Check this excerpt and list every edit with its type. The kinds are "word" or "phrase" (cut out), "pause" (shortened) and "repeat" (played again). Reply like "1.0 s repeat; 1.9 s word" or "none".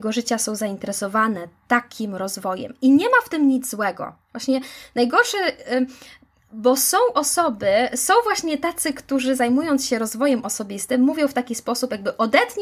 none

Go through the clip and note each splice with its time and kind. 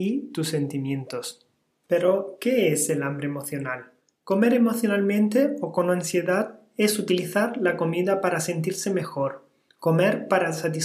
4.0 s pause

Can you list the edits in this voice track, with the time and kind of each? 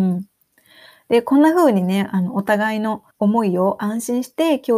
3.1 s pause

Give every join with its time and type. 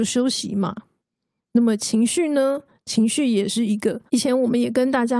4.1 s pause

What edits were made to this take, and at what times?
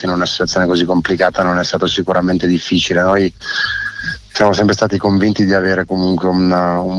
none

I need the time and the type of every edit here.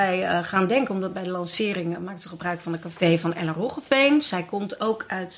none

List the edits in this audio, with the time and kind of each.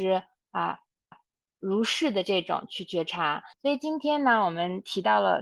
1.1 s repeat; 3.5 s pause

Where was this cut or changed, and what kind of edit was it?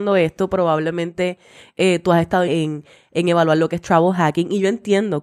2.5 s phrase

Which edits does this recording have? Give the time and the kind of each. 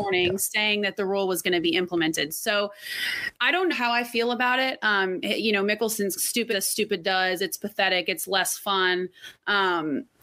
3.4 s word; 3.7 s word; 6.2 s word; 6.5 s word

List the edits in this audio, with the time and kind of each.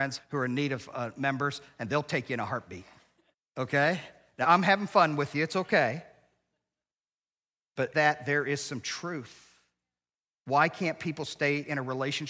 3.3 s pause; 4.4 s word; 7.9 s word

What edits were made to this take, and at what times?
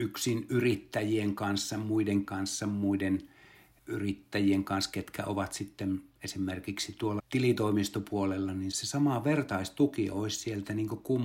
2.2 s word; 7.2 s word; 8.7 s word

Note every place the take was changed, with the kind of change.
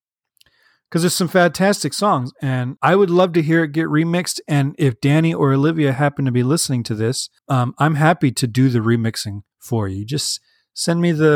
2.8 s word; 7.4 s pause; 9.5 s pause

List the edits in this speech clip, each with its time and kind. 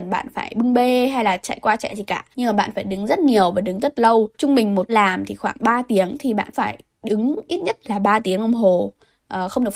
1.9 s word; 2.3 s pause; 4.3 s pause; 4.9 s word; 6.5 s word

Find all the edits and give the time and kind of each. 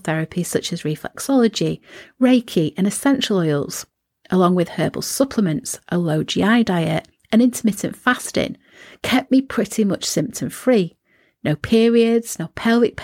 none

